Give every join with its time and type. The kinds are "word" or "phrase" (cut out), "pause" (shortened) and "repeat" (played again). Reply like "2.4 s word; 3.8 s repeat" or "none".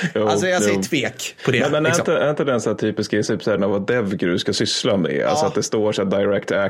3.3 s word; 3.6 s phrase